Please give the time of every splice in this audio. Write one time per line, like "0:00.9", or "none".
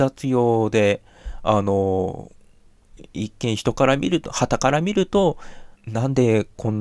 0:05.8